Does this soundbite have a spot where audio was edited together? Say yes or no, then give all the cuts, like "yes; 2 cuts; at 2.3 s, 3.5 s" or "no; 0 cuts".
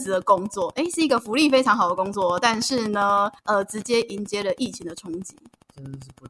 yes; 1 cut; at 3.4 s